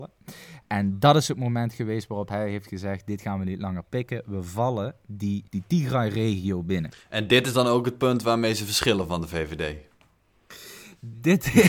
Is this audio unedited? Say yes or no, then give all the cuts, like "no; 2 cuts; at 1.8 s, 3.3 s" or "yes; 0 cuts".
no; 1 cut; at 5.5 s